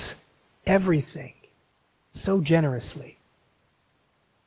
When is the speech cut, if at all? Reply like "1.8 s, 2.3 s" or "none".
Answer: none